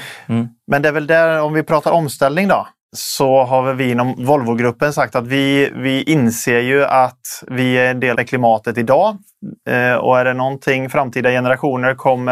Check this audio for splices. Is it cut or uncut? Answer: cut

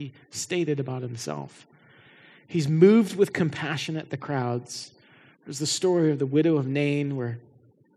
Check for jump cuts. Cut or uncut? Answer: uncut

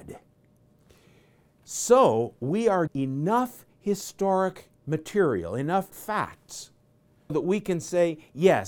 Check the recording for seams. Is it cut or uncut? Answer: cut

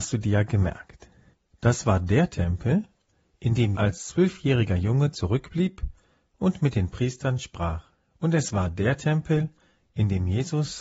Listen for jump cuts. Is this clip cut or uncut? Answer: cut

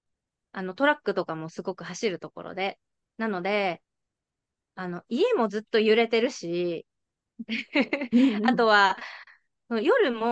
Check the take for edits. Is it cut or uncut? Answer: uncut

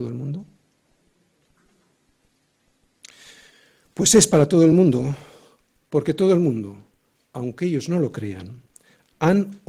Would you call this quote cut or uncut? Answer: uncut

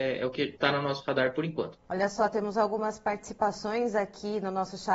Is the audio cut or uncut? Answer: cut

